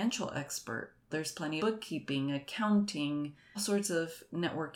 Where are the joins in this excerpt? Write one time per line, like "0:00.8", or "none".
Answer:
0:01.1
0:01.6
0:03.5